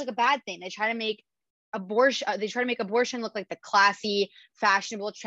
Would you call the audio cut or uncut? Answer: uncut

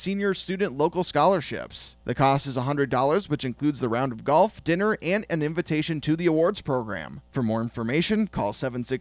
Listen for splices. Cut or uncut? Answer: uncut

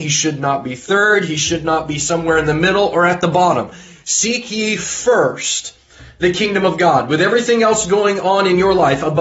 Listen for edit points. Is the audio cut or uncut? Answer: uncut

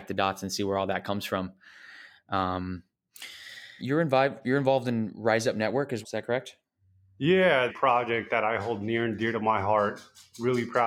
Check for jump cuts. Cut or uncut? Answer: cut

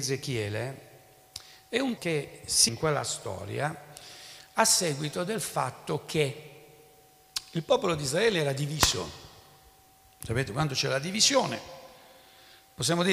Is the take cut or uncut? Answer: cut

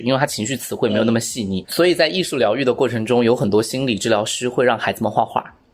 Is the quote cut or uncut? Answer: cut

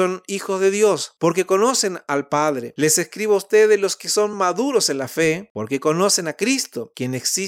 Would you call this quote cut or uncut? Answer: uncut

